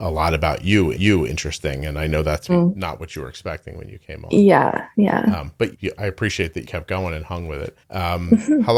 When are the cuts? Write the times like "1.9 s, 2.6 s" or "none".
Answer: 0.9 s, 2.5 s, 5.7 s, 6.6 s, 7.8 s